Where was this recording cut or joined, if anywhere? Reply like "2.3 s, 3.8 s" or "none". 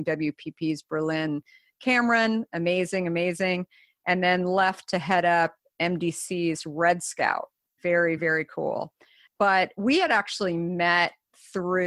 none